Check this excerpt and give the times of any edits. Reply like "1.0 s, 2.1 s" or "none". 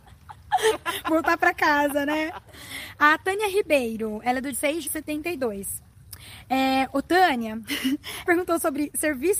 4.5 s, 4.8 s, 8.2 s